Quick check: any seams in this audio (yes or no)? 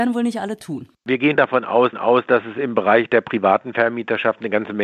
yes